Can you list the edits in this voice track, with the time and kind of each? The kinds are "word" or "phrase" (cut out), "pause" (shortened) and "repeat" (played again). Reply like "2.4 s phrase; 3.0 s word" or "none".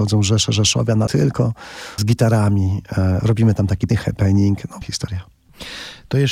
1.1 s word; 2.0 s word; 3.9 s word; 4.8 s word